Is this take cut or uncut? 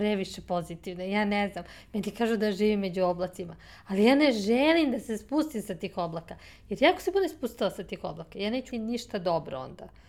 cut